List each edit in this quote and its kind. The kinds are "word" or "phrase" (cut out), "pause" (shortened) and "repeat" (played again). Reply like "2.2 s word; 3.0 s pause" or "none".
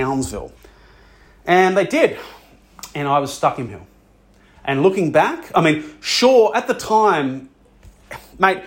3.7 s word